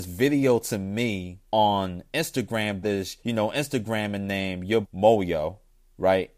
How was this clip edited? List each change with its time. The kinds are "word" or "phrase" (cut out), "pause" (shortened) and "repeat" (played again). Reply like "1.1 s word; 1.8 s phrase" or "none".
1.5 s pause; 2.8 s word; 3.2 s pause; 4.8 s word